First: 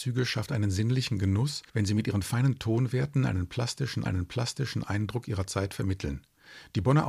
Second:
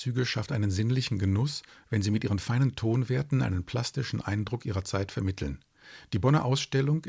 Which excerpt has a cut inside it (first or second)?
first